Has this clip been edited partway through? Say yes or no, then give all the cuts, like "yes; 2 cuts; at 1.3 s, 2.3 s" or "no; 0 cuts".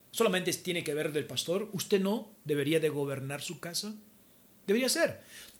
no; 0 cuts